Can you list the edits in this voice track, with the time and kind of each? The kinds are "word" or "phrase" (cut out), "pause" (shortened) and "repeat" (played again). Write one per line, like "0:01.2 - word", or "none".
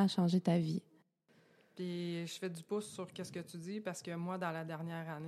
none